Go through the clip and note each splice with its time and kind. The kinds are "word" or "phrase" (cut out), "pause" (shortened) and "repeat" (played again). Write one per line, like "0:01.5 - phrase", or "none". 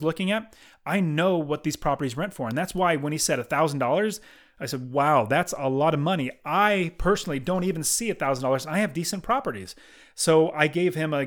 none